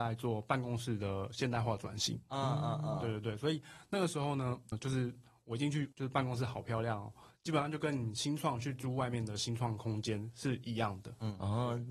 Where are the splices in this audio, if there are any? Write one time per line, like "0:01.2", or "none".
0:04.7
0:05.9